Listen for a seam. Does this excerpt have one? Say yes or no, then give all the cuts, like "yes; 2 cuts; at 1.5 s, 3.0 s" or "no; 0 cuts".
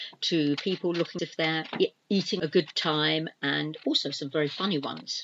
yes; 2 cuts; at 1.2 s, 2.4 s